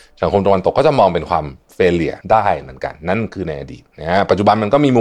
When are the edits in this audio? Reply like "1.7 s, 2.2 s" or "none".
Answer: 2.2 s